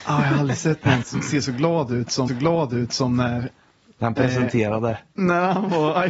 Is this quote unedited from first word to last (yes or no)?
no